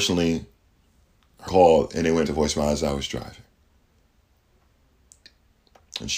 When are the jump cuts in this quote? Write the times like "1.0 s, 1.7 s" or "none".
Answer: 1.5 s, 2.2 s